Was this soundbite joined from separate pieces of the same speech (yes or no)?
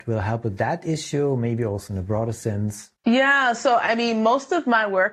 yes